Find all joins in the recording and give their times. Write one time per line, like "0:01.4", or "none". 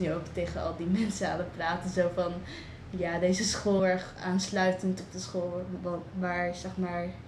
0:03.8